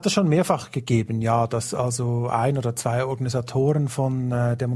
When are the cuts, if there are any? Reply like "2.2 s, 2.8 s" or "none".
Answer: none